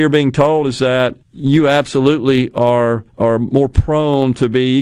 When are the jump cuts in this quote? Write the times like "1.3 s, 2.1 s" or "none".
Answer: 1.2 s, 3.1 s